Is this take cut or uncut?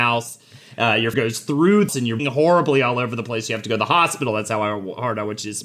cut